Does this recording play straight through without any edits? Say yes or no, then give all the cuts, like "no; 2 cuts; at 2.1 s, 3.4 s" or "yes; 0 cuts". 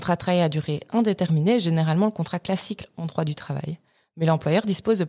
yes; 0 cuts